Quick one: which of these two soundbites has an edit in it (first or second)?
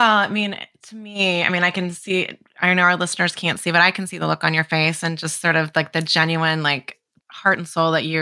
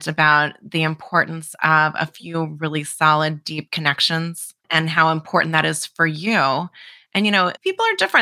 second